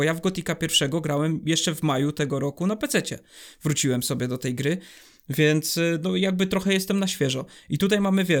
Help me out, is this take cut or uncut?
uncut